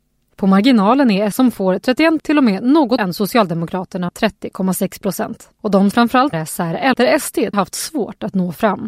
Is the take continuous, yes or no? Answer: no